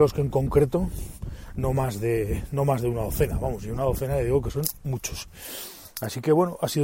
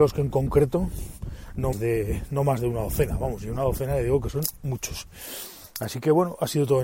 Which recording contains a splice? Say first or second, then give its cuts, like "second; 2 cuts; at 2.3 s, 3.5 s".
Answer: second; 1 cut; at 1.7 s